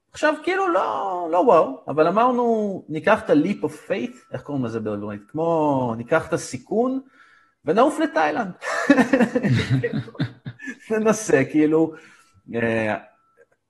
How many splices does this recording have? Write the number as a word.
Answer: zero